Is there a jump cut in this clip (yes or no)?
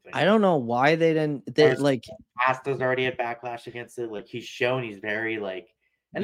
no